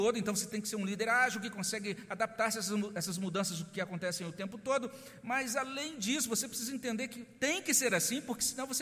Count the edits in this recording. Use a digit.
0